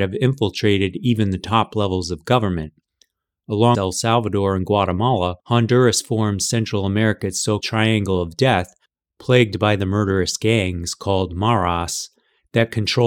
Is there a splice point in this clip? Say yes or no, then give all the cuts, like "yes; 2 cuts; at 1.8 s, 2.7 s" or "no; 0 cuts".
yes; 3 cuts; at 3.7 s, 5.4 s, 7.6 s